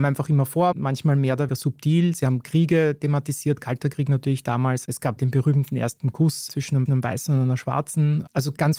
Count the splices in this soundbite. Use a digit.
2